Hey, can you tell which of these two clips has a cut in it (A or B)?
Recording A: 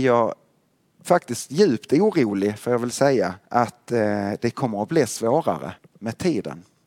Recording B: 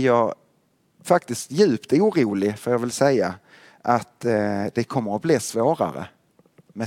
A